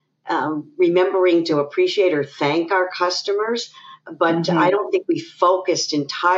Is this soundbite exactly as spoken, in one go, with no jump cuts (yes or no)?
yes